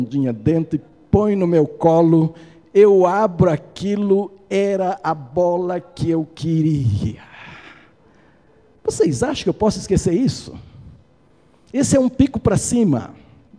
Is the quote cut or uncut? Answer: uncut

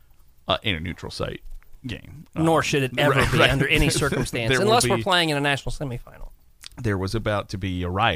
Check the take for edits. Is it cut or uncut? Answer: uncut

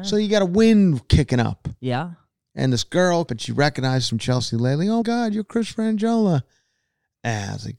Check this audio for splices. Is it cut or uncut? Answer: cut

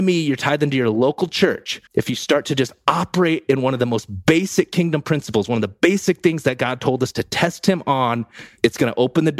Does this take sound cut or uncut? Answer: cut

